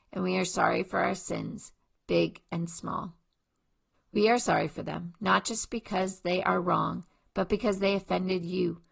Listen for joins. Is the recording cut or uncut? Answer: uncut